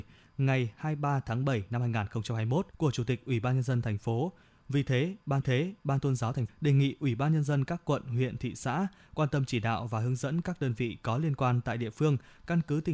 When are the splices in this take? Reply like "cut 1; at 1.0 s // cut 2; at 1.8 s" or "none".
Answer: cut 1; at 2.7 s // cut 2; at 5.4 s // cut 3; at 6.5 s